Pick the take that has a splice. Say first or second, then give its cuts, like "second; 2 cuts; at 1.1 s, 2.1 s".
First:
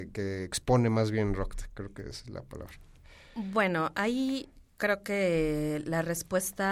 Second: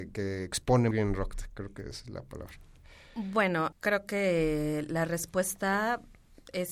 second; 2 cuts; at 0.9 s, 3.7 s